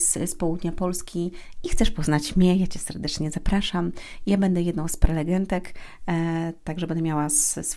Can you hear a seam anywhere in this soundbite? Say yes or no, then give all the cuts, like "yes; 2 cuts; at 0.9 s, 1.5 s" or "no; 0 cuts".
no; 0 cuts